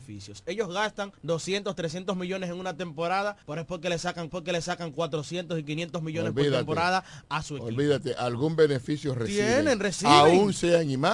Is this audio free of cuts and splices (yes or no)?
no